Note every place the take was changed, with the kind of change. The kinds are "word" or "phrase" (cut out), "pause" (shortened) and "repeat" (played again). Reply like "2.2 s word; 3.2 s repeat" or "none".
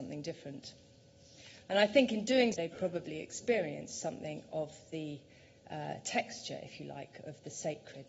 2.5 s phrase